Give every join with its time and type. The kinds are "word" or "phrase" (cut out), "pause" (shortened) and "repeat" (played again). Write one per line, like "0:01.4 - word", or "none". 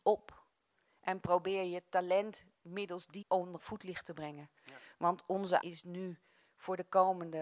0:03.2 - word
0:03.6 - word
0:05.6 - word